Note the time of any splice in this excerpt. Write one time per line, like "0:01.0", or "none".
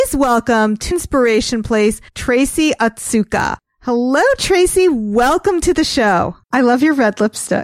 0:00.9
0:02.1
0:06.4